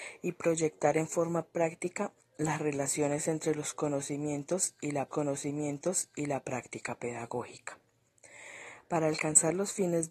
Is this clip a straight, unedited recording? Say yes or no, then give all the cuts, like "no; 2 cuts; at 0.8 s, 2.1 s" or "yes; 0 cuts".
no; 1 cut; at 5.1 s